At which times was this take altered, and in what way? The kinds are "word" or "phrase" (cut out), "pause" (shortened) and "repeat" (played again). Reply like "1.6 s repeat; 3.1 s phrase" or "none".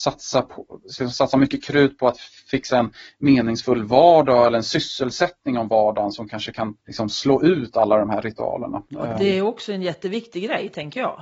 6.8 s pause; 8.9 s pause